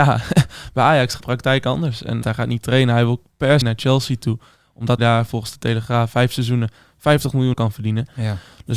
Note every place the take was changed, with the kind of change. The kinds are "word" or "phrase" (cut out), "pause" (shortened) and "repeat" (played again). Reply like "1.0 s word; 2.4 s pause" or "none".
1.2 s word; 2.2 s word; 3.6 s word; 5.0 s word; 6.1 s word; 7.5 s word